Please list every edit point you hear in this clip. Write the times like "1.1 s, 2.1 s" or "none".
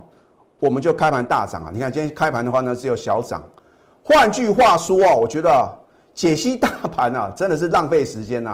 none